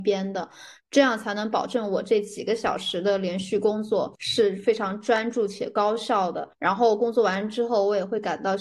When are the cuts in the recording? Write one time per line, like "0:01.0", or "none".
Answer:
0:04.2
0:06.5